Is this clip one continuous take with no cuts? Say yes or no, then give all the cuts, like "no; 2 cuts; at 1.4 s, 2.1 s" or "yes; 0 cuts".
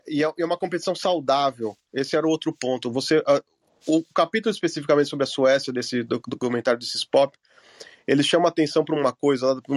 yes; 0 cuts